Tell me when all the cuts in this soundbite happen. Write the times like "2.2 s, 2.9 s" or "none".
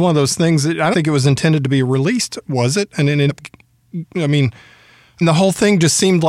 0.9 s, 3.3 s, 5.2 s